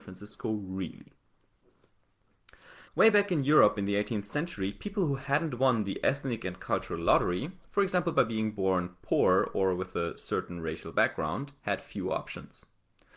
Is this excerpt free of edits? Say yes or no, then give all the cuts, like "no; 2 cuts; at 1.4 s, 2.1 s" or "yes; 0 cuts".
no; 1 cut; at 2.9 s